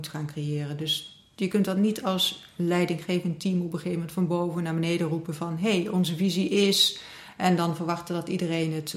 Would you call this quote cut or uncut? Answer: uncut